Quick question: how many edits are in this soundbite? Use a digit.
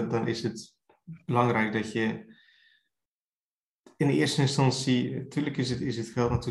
0